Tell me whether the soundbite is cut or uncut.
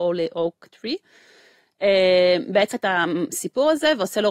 cut